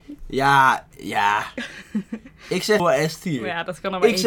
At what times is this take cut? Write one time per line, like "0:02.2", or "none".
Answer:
0:02.8

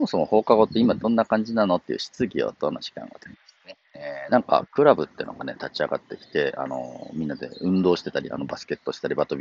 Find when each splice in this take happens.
0:03.8

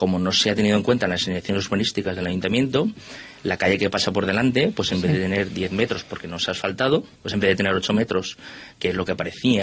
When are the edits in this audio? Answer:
0:07.1

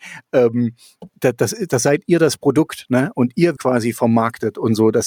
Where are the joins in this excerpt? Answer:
0:01.1
0:03.6

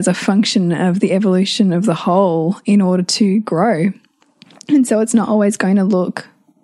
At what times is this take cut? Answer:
none

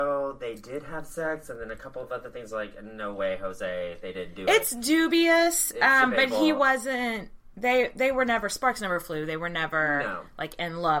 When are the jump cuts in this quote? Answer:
none

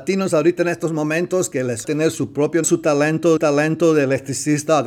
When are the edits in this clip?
0:01.8
0:02.6
0:03.4

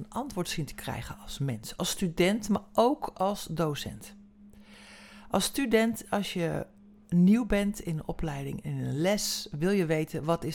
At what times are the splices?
none

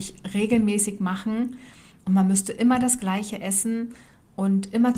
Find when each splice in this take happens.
none

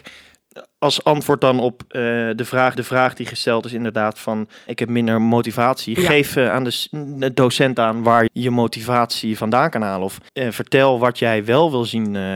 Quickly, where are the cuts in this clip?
0:02.8
0:04.7
0:08.3
0:10.3

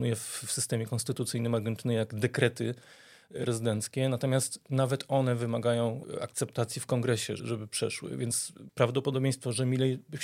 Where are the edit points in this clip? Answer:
0:03.4
0:07.4

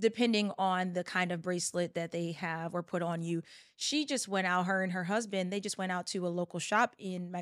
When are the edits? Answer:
none

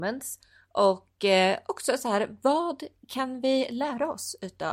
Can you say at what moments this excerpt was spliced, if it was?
none

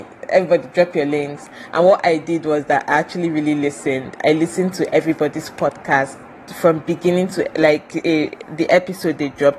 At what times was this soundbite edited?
none

